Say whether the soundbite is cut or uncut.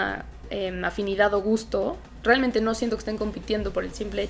uncut